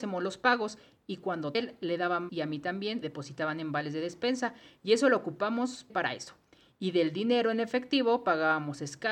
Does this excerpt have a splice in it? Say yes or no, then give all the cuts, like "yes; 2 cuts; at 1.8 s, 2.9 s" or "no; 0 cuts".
yes; 4 cuts; at 1.5 s, 2.3 s, 3.0 s, 5.9 s